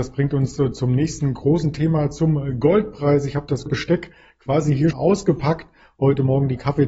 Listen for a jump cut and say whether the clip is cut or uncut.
cut